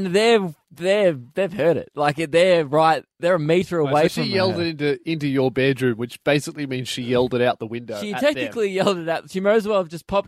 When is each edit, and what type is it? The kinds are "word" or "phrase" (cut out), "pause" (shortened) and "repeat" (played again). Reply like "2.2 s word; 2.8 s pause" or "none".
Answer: none